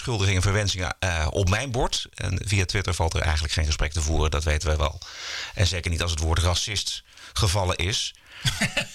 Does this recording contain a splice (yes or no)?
no